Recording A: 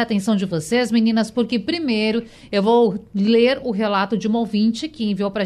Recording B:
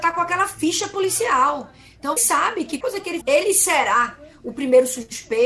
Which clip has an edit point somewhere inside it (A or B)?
B